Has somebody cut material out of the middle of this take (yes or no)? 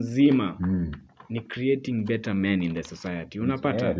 no